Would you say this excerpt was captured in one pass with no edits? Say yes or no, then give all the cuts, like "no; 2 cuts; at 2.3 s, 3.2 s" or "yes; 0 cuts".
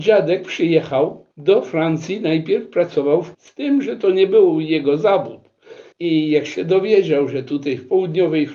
no; 3 cuts; at 1.3 s, 3.3 s, 5.9 s